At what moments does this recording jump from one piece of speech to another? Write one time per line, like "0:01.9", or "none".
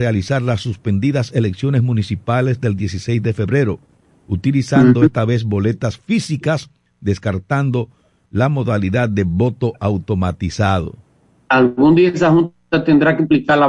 none